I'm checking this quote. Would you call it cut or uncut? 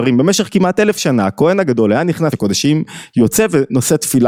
cut